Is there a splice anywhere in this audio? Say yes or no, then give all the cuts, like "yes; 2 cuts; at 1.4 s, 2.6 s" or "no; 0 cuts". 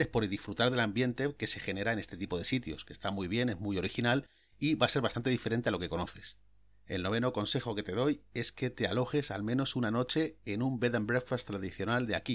no; 0 cuts